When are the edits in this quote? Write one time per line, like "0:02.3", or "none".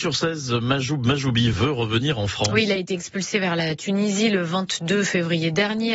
none